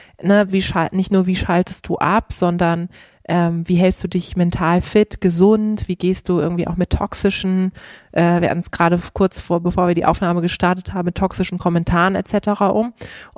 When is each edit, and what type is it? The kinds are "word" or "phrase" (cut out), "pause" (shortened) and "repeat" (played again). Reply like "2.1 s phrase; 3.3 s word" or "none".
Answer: none